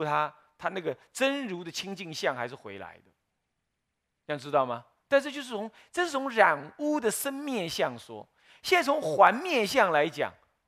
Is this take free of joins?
yes; 0 cuts

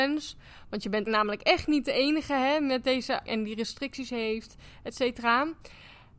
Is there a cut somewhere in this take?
yes; 2 cuts; at 1.1 s, 3.3 s

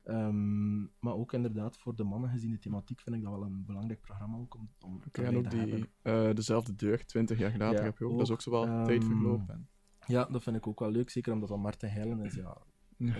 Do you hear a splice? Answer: no; 0 cuts

